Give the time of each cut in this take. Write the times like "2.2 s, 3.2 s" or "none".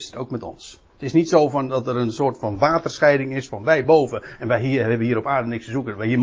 none